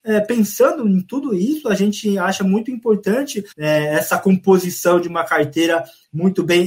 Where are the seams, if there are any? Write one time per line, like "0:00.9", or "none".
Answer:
0:03.5